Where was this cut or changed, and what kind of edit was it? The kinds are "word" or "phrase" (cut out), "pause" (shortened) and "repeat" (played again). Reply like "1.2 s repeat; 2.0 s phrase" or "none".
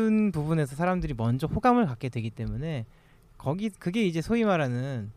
none